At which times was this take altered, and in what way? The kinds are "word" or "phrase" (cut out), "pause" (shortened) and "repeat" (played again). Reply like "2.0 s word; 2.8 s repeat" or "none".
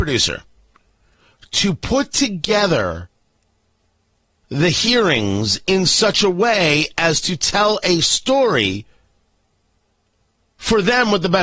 none